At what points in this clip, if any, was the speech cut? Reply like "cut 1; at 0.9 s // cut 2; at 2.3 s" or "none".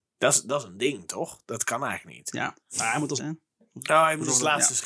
cut 1; at 2.7 s // cut 2; at 3.2 s